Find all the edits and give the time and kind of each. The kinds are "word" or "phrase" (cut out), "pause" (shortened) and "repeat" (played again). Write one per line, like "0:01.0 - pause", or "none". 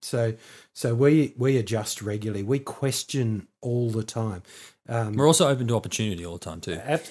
none